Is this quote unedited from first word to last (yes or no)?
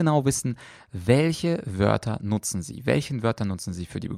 yes